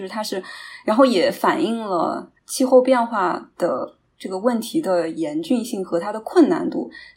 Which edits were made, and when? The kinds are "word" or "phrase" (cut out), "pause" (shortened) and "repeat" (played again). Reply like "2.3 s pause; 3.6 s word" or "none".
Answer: 2.4 s pause